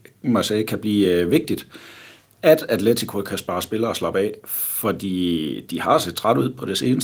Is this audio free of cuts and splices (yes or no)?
yes